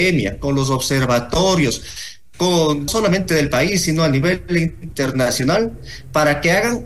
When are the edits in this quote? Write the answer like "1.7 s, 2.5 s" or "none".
2.9 s